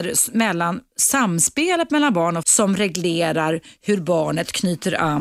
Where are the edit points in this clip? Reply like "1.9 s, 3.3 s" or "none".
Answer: 2.4 s